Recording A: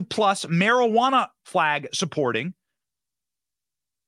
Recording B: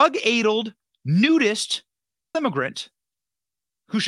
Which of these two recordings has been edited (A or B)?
B